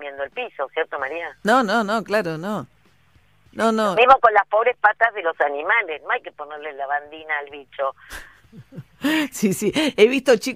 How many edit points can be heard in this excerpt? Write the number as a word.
zero